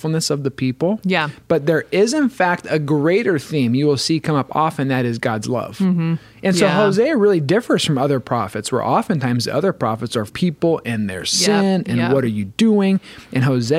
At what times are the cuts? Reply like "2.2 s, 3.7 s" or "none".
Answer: 10.3 s